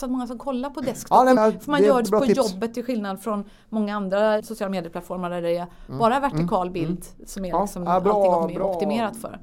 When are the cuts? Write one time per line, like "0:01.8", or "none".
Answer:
0:01.4
0:02.0
0:04.4